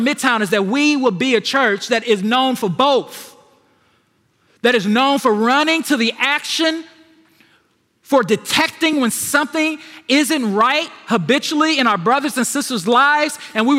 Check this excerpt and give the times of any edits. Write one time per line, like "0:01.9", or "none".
none